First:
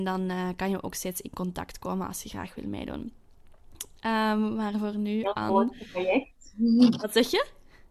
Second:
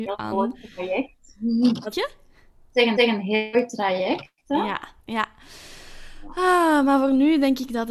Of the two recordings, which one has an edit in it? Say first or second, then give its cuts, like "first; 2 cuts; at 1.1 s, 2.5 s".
second; 3 cuts; at 1.9 s, 3.0 s, 5.0 s